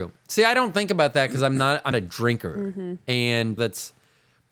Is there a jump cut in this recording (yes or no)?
yes